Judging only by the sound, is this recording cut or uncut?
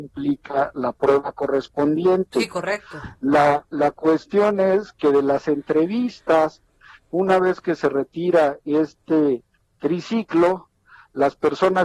uncut